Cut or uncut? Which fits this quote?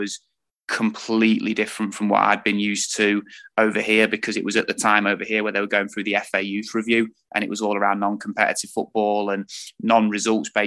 uncut